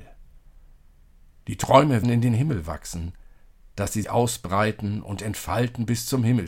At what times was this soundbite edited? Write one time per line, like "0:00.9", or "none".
0:02.0
0:04.0